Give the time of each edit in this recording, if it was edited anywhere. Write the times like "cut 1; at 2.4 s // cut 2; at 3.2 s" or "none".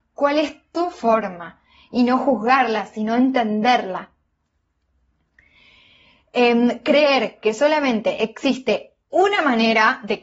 none